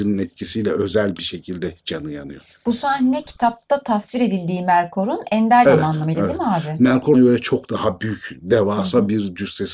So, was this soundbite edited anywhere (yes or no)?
yes